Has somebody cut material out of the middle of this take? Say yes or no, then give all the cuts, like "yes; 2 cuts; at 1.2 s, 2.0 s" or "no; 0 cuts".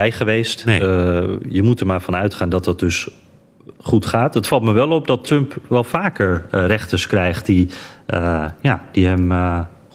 no; 0 cuts